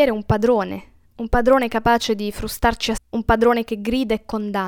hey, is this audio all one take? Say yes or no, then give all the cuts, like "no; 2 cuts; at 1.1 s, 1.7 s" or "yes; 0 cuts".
no; 1 cut; at 3.0 s